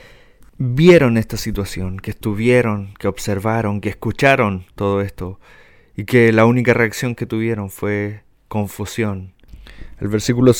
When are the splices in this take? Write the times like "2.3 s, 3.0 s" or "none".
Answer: none